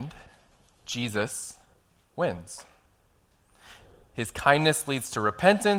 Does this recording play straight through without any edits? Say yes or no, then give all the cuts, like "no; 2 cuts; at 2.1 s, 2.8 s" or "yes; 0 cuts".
yes; 0 cuts